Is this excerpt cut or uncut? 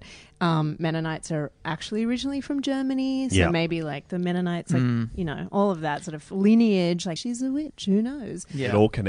cut